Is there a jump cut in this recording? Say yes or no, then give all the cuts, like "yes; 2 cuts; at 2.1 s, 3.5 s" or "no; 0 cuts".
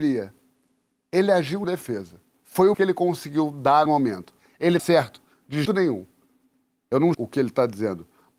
yes; 6 cuts; at 1.6 s, 2.7 s, 3.9 s, 4.8 s, 5.7 s, 7.1 s